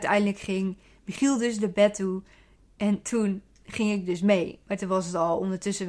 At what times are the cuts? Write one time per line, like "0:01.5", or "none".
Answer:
none